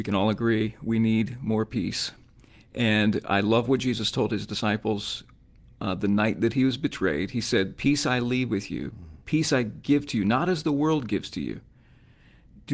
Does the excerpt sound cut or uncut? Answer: uncut